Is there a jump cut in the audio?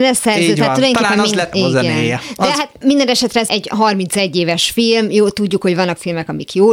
yes; 2 cuts; at 1.5 s, 3.5 s

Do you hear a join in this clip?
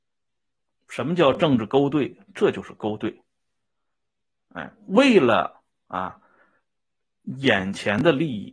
no; 0 cuts

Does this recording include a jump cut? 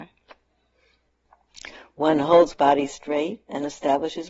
yes; 1 cut; at 2.5 s

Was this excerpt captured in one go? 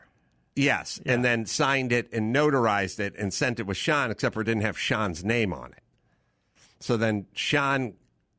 yes; 0 cuts

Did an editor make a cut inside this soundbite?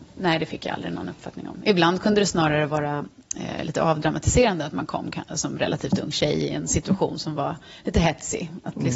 no; 0 cuts

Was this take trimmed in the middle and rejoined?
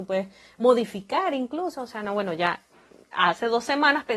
no; 0 cuts

